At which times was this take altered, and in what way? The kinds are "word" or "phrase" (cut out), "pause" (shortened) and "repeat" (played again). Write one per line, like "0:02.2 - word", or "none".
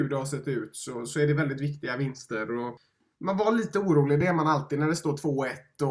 none

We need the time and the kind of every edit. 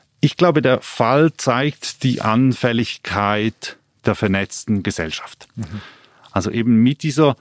none

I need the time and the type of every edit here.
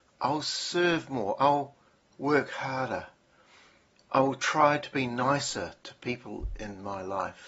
none

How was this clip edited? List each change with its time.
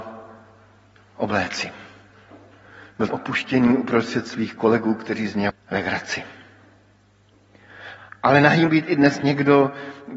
0:03.1 - word
0:05.5 - word
0:08.7 - word

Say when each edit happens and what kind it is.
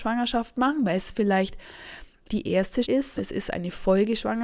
0:02.3 - word
0:02.8 - word
0:03.2 - word

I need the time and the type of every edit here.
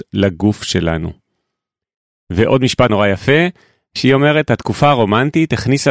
0:02.9 - word

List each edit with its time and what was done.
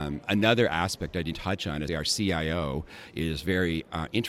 0:01.3 - word
0:01.9 - word

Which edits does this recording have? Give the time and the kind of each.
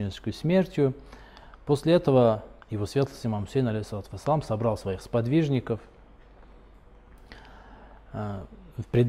0:02.6 - pause

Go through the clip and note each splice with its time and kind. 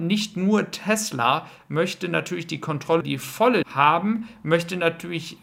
0:03.0 - word
0:03.6 - word

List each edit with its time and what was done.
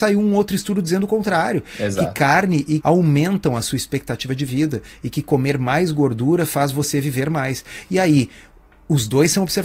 0:02.8 - word

